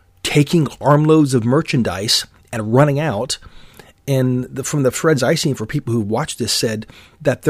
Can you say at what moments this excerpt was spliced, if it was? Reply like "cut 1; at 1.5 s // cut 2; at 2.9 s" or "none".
none